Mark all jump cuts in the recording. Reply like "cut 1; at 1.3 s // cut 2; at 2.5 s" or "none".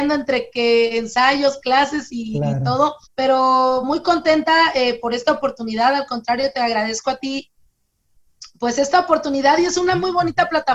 cut 1; at 3.0 s